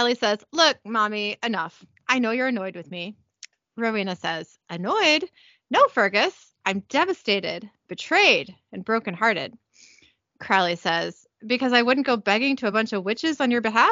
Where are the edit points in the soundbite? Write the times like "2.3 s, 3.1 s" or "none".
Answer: none